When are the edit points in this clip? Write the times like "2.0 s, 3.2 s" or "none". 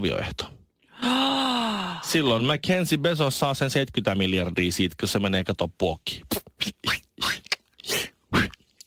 none